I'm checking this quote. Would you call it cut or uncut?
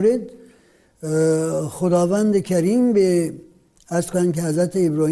uncut